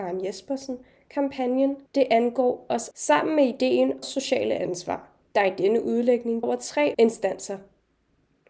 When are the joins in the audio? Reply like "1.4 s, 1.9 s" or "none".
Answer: 1.9 s, 2.9 s, 4.0 s, 5.2 s, 6.4 s, 6.9 s